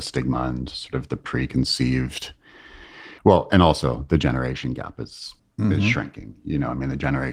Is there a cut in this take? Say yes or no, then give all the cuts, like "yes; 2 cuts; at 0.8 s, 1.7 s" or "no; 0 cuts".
yes; 2 cuts; at 3.2 s, 5.4 s